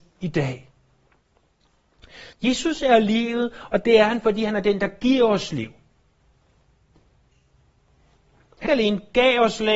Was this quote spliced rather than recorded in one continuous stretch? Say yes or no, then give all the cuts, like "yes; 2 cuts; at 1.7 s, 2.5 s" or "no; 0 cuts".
yes; 2 cuts; at 2.3 s, 8.7 s